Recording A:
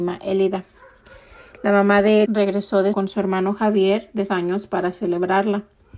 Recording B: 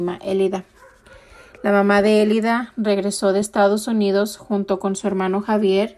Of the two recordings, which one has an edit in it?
A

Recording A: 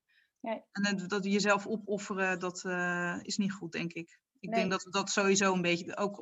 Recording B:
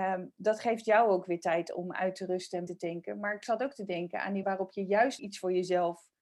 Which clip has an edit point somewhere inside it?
B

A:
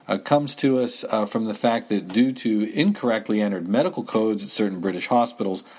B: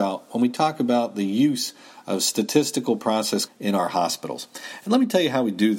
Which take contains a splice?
B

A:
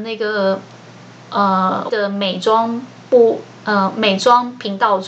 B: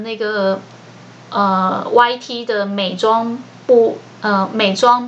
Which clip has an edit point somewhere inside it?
A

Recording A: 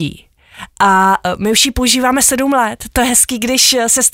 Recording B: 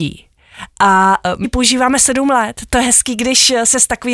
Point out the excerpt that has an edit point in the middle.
B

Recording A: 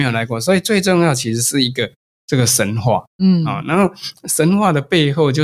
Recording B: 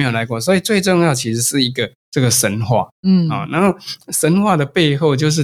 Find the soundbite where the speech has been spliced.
B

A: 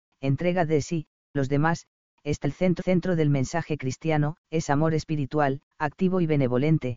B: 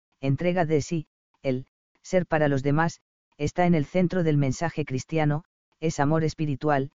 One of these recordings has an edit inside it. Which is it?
A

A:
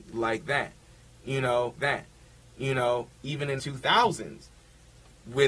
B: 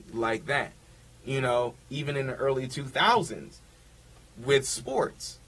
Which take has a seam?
A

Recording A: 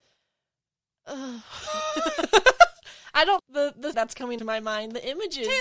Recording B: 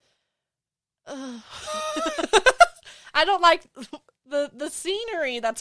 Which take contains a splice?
A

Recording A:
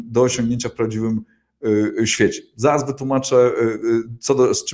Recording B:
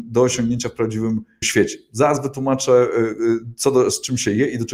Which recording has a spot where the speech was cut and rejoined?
B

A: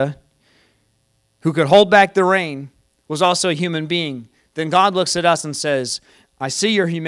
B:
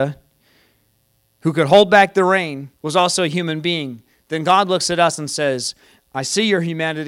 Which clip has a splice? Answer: B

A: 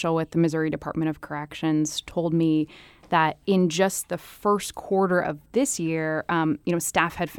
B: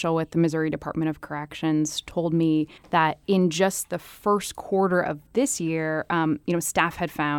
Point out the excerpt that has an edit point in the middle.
B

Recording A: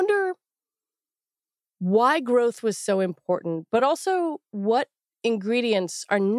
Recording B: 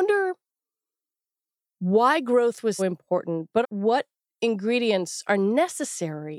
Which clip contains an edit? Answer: B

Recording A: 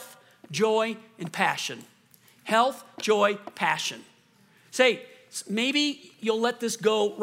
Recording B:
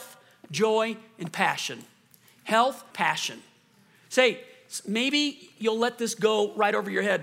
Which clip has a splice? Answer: B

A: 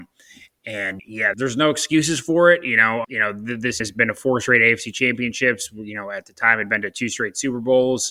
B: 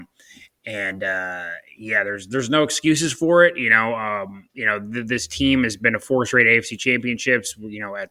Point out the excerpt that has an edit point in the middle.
A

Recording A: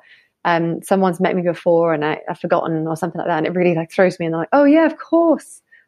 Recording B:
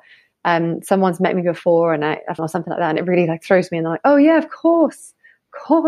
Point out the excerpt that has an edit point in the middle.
B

